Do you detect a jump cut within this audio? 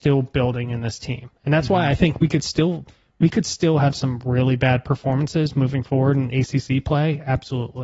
no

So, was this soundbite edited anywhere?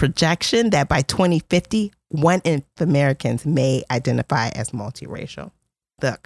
yes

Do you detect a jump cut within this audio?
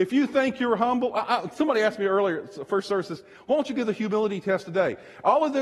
no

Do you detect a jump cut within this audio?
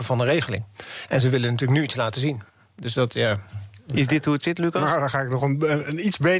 no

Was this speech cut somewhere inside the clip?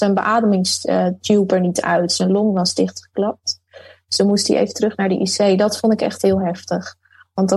no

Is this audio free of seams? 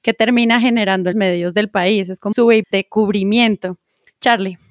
no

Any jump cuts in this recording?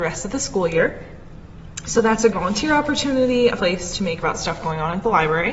yes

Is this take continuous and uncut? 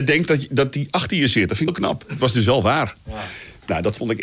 no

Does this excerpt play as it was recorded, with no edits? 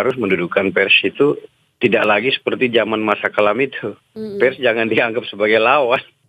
yes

